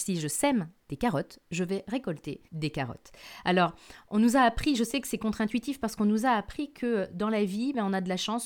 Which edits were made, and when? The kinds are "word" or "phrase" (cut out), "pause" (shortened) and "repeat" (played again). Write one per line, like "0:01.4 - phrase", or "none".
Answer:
0:02.5 - pause

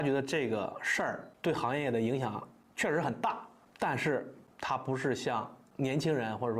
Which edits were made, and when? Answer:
none

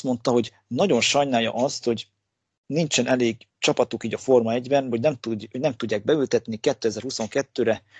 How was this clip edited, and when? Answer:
0:03.5 - pause

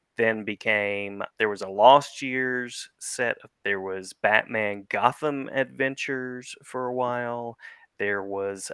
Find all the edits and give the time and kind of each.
0:01.3 - word
0:03.6 - word

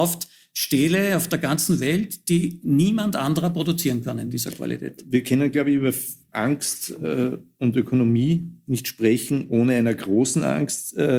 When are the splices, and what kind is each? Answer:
none

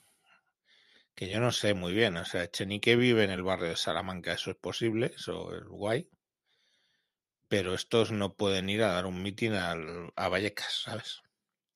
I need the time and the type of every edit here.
none

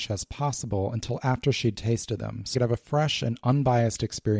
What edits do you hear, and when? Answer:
0:02.5 - word

